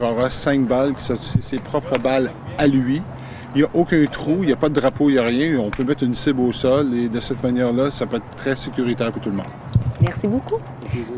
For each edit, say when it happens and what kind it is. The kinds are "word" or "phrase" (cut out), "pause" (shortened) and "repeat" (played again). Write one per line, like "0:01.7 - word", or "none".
0:08.3 - word